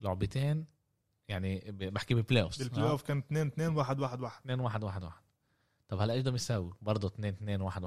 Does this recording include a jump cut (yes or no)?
no